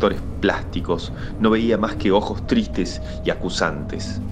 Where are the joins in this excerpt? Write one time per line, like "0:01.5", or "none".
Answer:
none